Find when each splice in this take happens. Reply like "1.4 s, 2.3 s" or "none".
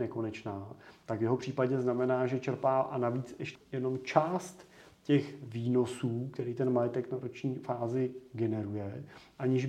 3.5 s